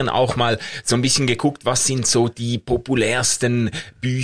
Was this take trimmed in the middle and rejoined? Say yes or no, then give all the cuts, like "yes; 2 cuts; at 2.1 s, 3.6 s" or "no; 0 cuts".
no; 0 cuts